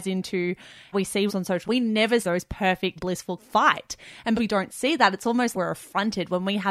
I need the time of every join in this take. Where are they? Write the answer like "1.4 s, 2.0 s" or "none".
0.9 s, 1.3 s, 1.7 s, 2.2 s, 3.0 s, 3.4 s, 4.4 s, 5.5 s